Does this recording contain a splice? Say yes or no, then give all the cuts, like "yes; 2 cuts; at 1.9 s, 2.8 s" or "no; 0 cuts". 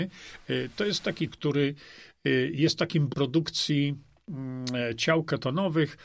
yes; 2 cuts; at 1.3 s, 3.1 s